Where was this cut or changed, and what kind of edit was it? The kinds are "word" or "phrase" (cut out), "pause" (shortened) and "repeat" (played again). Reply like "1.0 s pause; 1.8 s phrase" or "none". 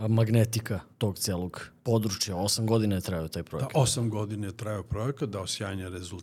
0.9 s pause; 1.8 s pause